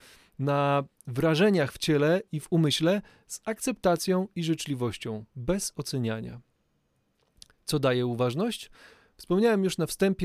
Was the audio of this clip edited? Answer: no; 0 cuts

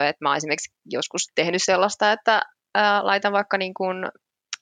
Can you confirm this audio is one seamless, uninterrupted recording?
yes; 0 cuts

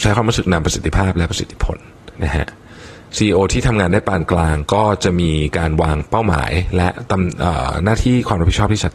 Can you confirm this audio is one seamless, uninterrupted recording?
no; 1 cut; at 2.1 s

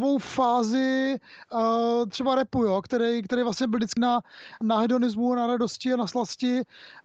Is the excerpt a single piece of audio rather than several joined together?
no; 3 cuts; at 2.1 s, 4.0 s, 4.6 s

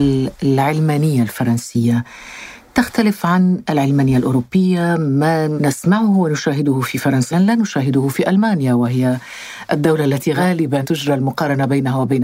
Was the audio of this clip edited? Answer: yes; 2 cuts; at 7.3 s, 10.8 s

